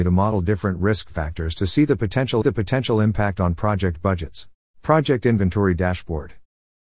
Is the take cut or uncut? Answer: cut